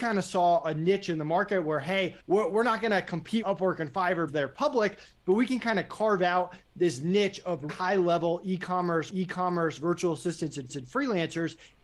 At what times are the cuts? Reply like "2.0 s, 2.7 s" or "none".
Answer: 2.2 s, 3.4 s, 4.3 s, 7.7 s, 9.1 s, 10.7 s